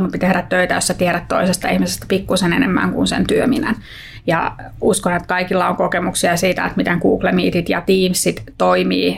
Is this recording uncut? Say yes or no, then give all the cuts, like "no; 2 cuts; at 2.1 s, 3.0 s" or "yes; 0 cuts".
yes; 0 cuts